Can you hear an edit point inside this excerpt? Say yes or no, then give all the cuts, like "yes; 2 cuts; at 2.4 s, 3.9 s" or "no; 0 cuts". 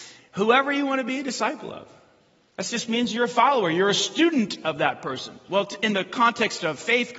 no; 0 cuts